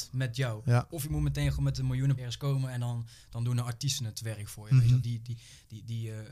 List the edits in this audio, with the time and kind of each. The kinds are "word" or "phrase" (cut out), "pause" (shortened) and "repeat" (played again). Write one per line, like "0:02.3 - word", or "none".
0:02.2 - word
0:05.0 - word